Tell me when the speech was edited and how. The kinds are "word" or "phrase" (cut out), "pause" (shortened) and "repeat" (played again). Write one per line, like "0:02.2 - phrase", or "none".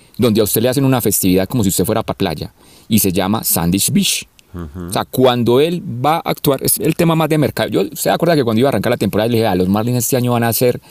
0:02.1 - word
0:06.8 - phrase